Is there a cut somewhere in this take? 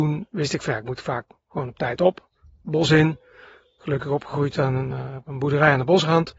no; 0 cuts

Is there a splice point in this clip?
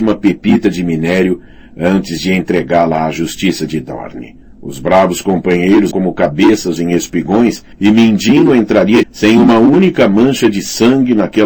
yes; 5 cuts; at 4.4 s, 5.9 s, 6.8 s, 7.7 s, 9.0 s

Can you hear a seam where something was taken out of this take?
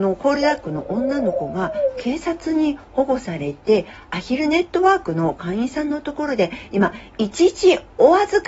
no; 0 cuts

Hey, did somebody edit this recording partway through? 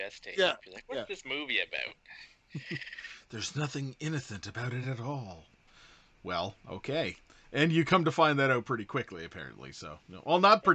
no; 0 cuts

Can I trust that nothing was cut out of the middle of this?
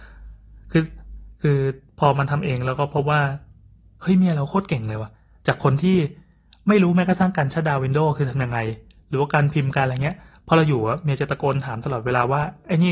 yes; 0 cuts

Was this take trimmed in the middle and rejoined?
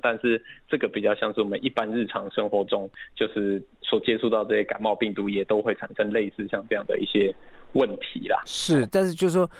no; 0 cuts

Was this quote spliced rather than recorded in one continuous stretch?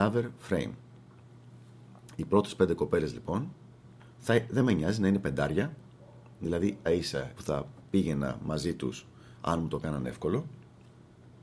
yes; 3 cuts; at 6.4 s, 6.9 s, 7.4 s

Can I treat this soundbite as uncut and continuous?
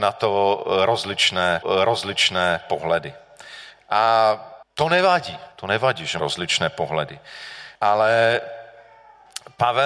no; 5 cuts; at 1.6 s, 4.6 s, 5.5 s, 6.2 s, 7.8 s

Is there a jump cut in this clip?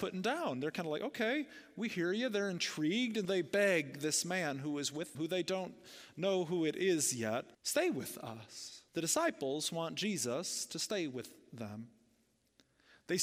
yes; 4 cuts; at 3.2 s, 5.1 s, 7.5 s, 8.9 s

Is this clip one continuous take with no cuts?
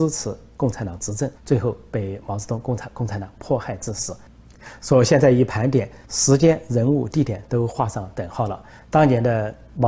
no; 2 cuts; at 1.4 s, 6.0 s

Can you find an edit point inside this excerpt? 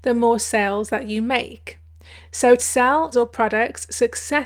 yes; 2 cuts; at 2.6 s, 3.1 s

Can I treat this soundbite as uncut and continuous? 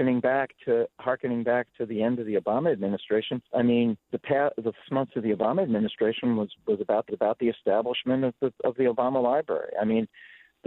no; 4 cuts; at 3.5 s, 4.0 s, 4.8 s, 7.1 s

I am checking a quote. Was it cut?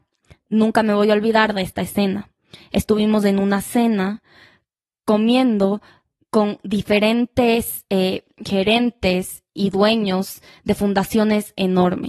no; 0 cuts

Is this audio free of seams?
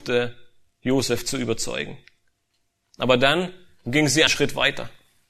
no; 1 cut; at 4.3 s

